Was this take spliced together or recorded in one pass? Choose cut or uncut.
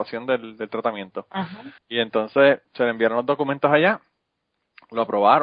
cut